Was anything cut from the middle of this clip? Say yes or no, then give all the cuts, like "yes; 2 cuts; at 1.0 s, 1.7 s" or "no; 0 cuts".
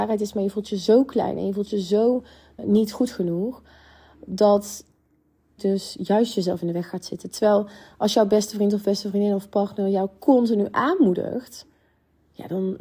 yes; 2 cuts; at 2.6 s, 5.6 s